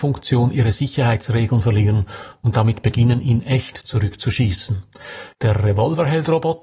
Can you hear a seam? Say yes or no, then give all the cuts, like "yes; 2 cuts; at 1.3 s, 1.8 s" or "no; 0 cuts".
yes; 1 cut; at 5.3 s